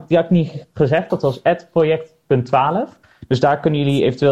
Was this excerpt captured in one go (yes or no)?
no